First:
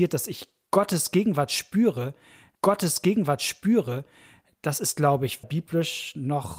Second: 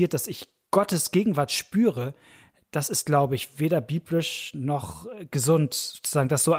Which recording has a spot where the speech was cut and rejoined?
first; 2 cuts; at 2.5 s, 5.4 s

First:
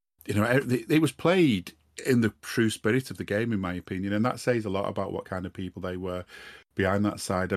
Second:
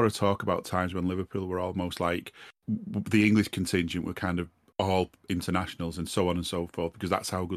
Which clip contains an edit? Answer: second; 2 cuts; at 2.6 s, 4.7 s

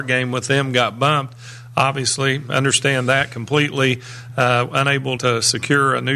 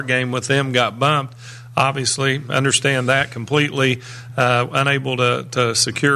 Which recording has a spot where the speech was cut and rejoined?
first; 1 cut; at 5.2 s

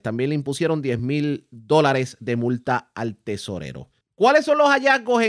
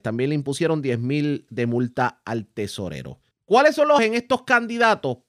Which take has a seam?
second; 2 cuts; at 1.5 s, 4.0 s

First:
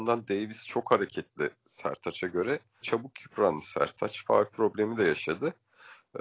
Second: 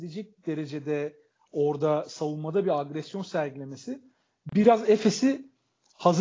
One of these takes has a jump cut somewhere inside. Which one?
first; 1 cut; at 2.8 s

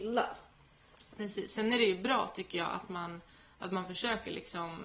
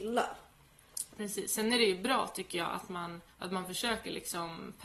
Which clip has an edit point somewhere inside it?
second; 1 cut; at 3.3 s

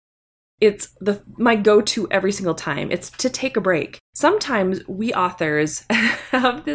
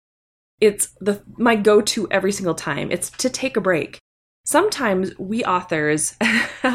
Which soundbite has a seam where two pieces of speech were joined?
first; 1 cut; at 4.0 s

